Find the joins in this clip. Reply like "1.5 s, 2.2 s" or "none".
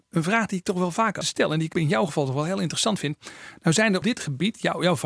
1.2 s, 1.7 s, 4.0 s